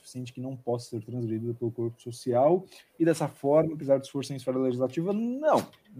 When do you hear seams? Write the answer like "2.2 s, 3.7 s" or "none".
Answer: none